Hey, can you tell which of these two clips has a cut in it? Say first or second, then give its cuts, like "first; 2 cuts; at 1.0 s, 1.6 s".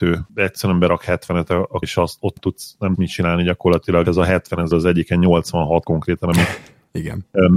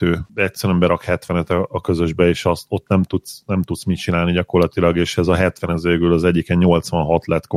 first; 6 cuts; at 1.8 s, 2.4 s, 2.9 s, 4.0 s, 4.7 s, 5.8 s